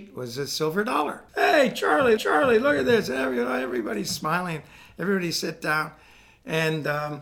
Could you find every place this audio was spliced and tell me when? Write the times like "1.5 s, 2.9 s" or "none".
1.3 s, 2.2 s